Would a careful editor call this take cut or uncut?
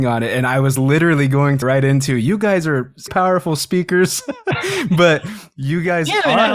cut